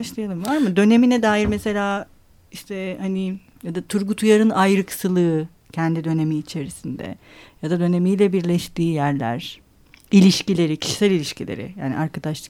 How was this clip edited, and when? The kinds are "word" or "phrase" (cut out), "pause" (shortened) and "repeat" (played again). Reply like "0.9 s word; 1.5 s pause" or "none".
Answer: none